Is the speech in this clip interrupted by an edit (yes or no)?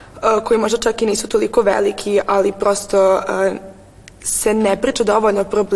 no